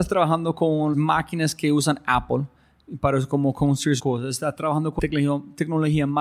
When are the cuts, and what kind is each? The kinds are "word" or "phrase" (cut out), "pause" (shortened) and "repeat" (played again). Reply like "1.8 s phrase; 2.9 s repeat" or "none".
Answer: 0.9 s word; 4.0 s word; 5.0 s word